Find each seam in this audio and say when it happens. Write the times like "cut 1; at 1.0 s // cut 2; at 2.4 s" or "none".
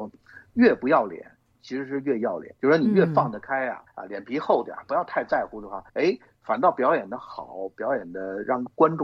cut 1; at 2.6 s // cut 2; at 3.9 s // cut 3; at 5.9 s